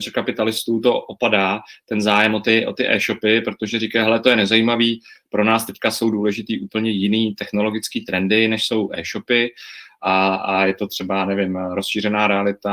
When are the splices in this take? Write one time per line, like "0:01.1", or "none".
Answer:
none